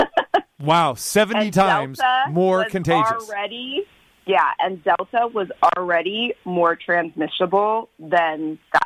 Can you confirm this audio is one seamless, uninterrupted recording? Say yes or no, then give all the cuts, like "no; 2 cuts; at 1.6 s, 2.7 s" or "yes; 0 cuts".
yes; 0 cuts